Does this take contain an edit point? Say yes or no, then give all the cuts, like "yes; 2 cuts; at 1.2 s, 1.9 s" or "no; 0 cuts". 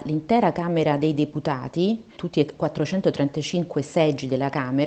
yes; 1 cut; at 2.2 s